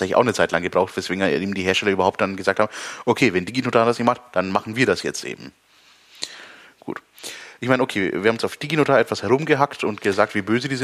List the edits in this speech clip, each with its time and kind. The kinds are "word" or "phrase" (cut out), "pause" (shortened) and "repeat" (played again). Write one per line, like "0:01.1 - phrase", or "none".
none